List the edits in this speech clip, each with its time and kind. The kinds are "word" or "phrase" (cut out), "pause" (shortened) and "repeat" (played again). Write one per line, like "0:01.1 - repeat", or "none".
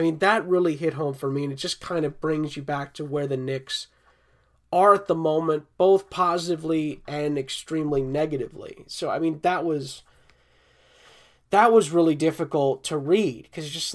none